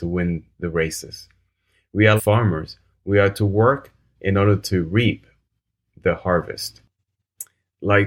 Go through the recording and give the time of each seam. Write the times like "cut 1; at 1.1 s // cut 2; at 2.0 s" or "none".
cut 1; at 2.2 s // cut 2; at 4.1 s